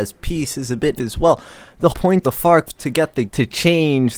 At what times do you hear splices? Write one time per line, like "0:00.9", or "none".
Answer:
0:01.0
0:01.9
0:02.2
0:02.7
0:03.3